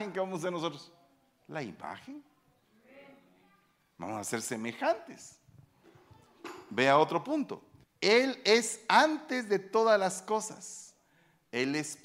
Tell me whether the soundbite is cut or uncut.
cut